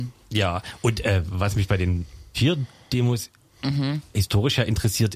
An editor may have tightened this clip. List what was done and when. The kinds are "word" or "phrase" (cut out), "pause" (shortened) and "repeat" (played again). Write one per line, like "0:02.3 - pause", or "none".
0:02.3 - word

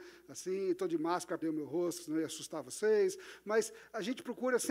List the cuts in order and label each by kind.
0:01.4 - word

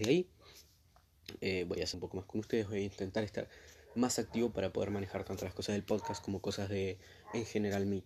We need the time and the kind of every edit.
0:01.9 - phrase

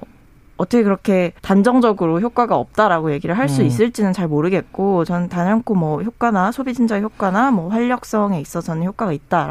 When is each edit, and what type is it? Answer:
0:01.4 - pause

